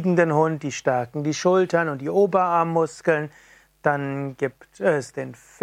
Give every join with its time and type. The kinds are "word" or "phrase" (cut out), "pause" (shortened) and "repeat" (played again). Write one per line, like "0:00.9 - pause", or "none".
none